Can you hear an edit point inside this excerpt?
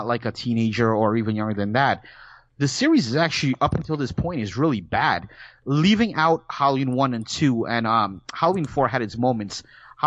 no; 0 cuts

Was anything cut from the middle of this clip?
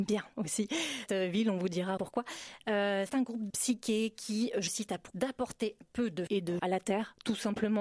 yes; 9 cuts; at 1.1 s, 2.0 s, 3.1 s, 3.5 s, 4.7 s, 5.1 s, 5.8 s, 6.3 s, 6.6 s

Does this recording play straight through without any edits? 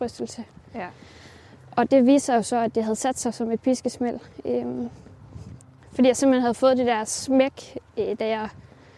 yes; 0 cuts

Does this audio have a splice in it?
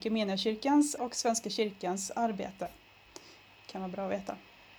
yes; 1 cut; at 1.0 s

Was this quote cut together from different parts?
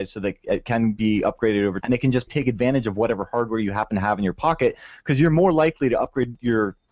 yes; 2 cuts; at 1.8 s, 2.3 s

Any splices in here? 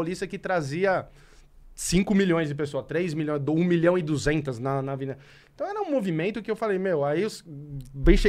no; 0 cuts

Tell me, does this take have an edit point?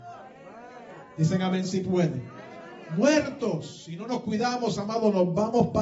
no; 0 cuts

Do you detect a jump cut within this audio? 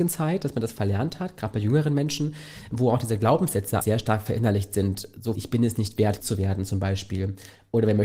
yes; 4 cuts; at 2.7 s, 3.8 s, 5.4 s, 6.2 s

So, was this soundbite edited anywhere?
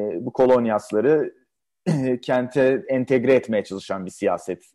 no; 0 cuts

